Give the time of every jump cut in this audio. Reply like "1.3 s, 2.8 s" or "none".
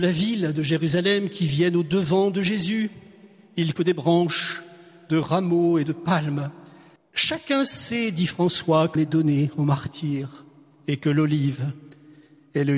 3.7 s, 7.0 s, 8.9 s